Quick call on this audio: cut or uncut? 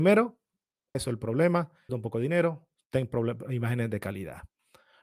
cut